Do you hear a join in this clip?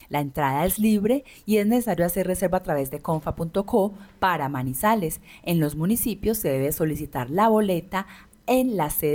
no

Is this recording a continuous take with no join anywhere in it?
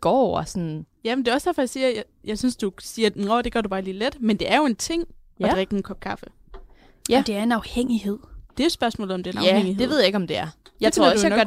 no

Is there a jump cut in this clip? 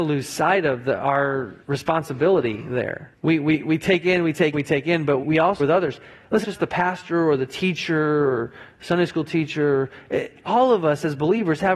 yes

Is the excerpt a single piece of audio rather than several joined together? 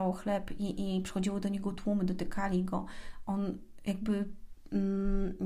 yes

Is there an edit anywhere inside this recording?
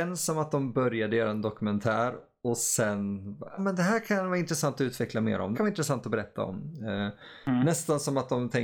yes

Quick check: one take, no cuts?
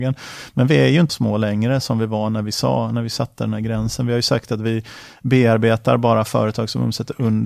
no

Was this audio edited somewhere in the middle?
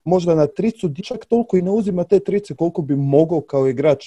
yes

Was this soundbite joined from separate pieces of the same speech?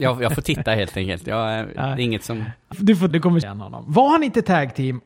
yes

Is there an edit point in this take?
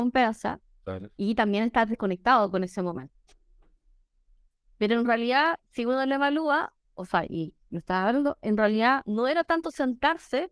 no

